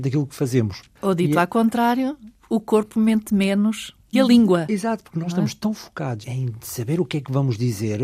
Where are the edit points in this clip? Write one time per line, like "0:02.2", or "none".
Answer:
0:04.1
0:06.2